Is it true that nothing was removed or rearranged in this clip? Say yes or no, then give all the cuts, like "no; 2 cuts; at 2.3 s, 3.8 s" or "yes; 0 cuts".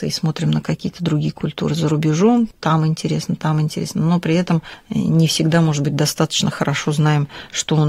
yes; 0 cuts